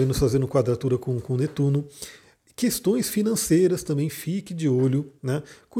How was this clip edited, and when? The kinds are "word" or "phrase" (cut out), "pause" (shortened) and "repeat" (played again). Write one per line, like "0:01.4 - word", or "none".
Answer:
none